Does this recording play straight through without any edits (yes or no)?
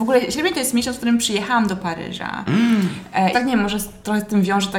no